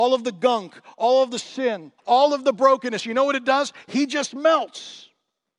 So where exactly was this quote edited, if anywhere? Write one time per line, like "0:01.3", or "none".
0:02.0

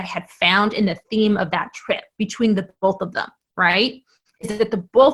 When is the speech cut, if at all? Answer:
none

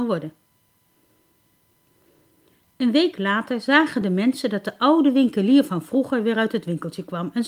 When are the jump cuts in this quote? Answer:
none

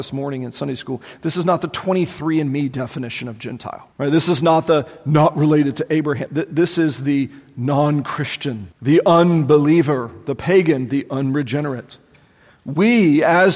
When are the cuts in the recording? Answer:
0:03.9
0:08.7

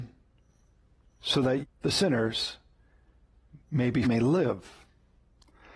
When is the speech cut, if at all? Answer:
0:01.6
0:03.6
0:04.0

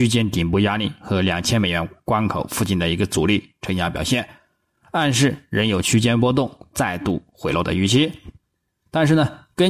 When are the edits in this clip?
none

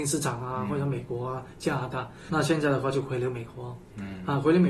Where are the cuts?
0:02.3

